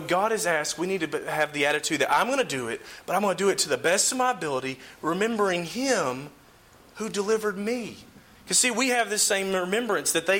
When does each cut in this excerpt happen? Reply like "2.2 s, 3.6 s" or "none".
none